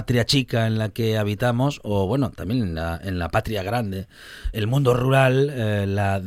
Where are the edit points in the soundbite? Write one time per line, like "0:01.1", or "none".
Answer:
0:04.5